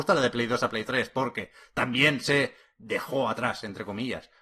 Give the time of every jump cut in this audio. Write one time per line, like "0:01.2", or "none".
none